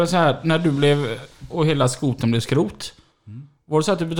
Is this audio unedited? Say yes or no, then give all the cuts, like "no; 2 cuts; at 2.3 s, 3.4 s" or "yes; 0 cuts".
no; 1 cut; at 1.5 s